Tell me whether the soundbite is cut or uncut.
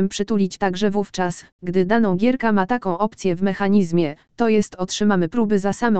uncut